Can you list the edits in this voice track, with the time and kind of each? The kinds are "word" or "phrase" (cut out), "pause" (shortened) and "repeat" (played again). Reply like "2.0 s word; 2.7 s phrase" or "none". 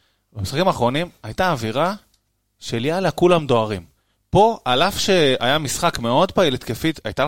none